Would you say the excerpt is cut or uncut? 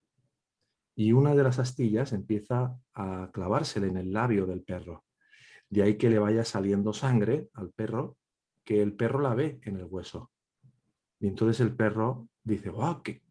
uncut